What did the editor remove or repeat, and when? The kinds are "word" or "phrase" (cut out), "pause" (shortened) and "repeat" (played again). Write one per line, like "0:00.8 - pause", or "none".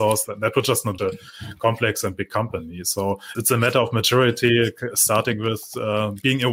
0:01.0 - phrase
0:03.3 - word

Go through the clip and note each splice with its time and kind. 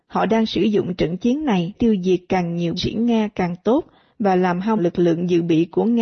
0:01.7 - word
0:02.8 - word
0:04.8 - word

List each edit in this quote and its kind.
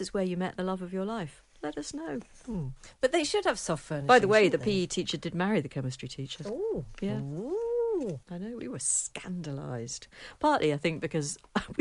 0:08.2 - pause

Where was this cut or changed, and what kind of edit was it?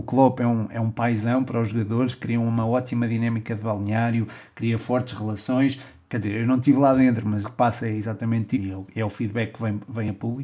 0:07.4 - word
0:08.5 - word

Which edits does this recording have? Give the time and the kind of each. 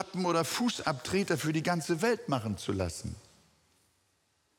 none

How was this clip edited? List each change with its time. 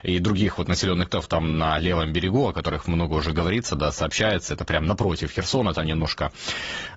0:01.1 - word

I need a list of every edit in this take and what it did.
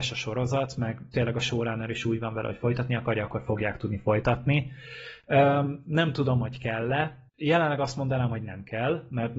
0:07.3 - pause

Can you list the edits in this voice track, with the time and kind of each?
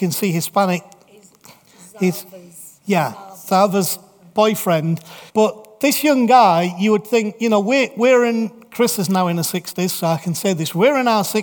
0:02.8 - pause
0:05.3 - pause

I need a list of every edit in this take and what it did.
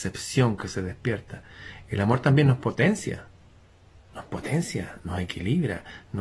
none

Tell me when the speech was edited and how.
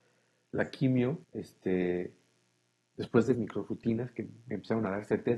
0:01.2 - pause
0:03.3 - word

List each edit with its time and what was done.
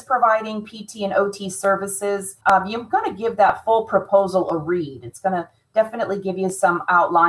0:02.4 - pause

